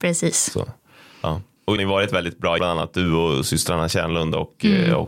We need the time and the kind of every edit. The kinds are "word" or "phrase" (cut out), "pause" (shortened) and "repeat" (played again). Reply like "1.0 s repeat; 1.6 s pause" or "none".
1.8 s phrase; 2.6 s phrase

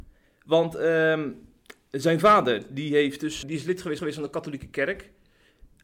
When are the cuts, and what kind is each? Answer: 3.4 s word; 4.0 s repeat

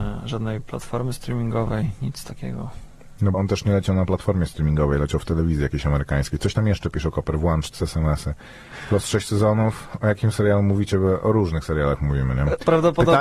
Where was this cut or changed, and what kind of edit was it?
3.3 s word; 7.7 s word

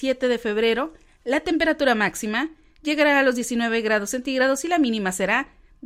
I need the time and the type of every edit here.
none

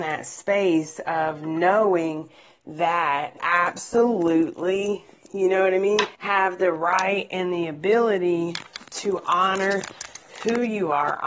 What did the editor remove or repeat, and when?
3.4 s word; 6.1 s pause

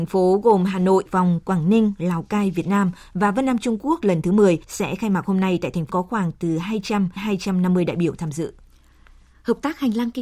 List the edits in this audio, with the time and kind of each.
1.1 s word; 4.6 s pause; 5.9 s phrase; 7.2 s word

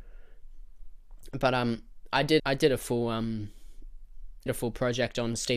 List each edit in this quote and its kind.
2.4 s word; 4.5 s word

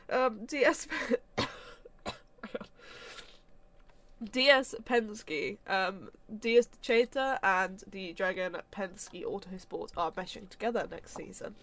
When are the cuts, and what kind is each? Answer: 1.3 s pause

